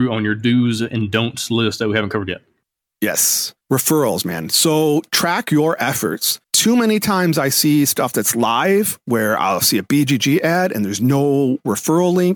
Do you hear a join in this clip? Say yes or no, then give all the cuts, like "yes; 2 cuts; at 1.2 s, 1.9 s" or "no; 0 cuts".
yes; 2 cuts; at 3.6 s, 6.4 s